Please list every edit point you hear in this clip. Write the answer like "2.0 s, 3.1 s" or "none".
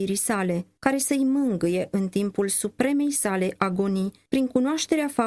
none